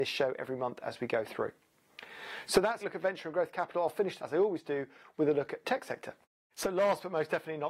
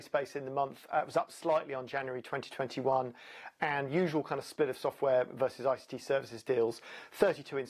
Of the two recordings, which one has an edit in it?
first; 4 cuts; at 2.8 s, 4.2 s, 5.6 s, 6.2 s

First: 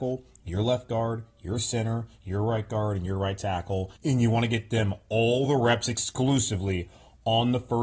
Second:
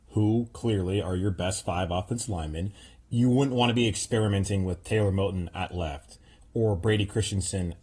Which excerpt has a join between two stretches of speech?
first; 1 cut; at 4.0 s

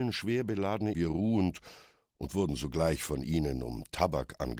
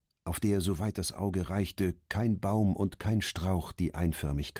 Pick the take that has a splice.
first; 1 cut; at 0.9 s

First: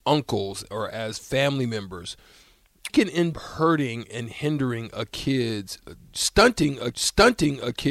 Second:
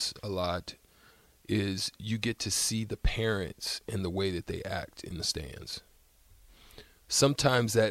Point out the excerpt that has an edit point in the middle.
first; 4 cuts; at 2.9 s, 3.3 s, 5.8 s, 6.9 s

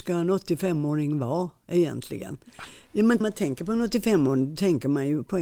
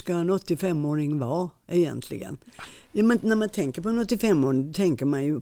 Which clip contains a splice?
first; 1 cut; at 3.2 s

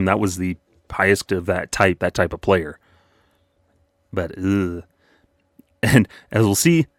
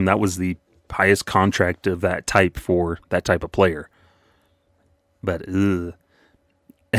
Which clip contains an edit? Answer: first; 2 cuts; at 1.3 s, 2.0 s

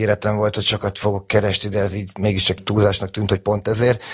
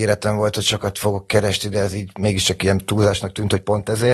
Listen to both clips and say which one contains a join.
first; 1 cut; at 2.6 s

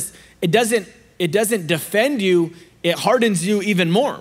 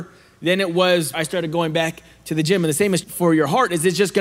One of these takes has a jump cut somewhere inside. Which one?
second; 2 cuts; at 1.1 s, 3.0 s

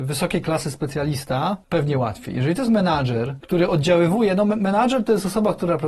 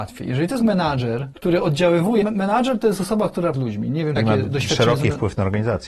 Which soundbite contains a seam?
second; 3 cuts; at 2.2 s, 3.5 s, 4.2 s

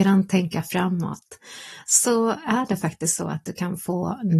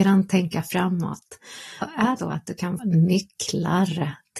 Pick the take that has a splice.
second; 3 cuts; at 1.8 s, 2.2 s, 2.8 s

